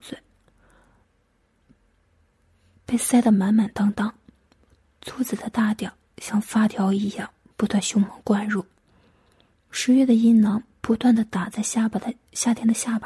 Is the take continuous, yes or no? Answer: yes